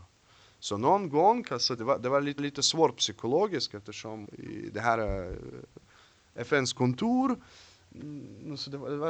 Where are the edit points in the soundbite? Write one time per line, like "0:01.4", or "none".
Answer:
0:01.8
0:02.4
0:04.2